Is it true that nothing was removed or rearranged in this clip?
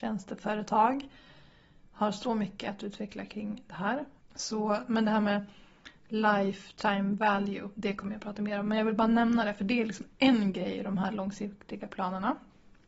no; 1 cut; at 4.2 s

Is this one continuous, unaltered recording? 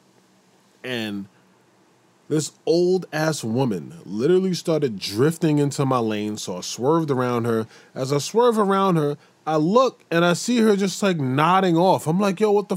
yes; 0 cuts

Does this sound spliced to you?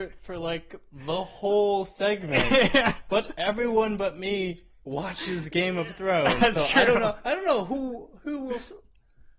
no; 0 cuts

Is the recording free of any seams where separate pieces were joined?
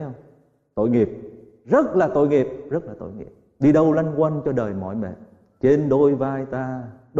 yes; 0 cuts

